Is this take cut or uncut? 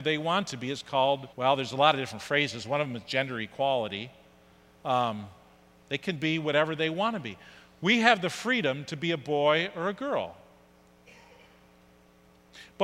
cut